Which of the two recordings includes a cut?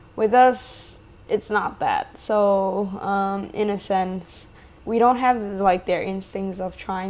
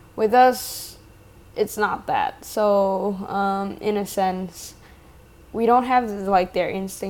first; 2 cuts; at 1.1 s, 4.8 s

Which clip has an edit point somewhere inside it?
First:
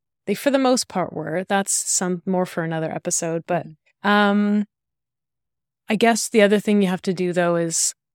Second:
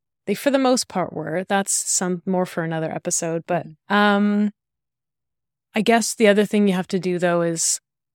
second; 1 cut; at 3.8 s

